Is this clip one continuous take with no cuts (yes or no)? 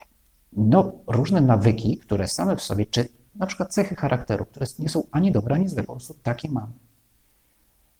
yes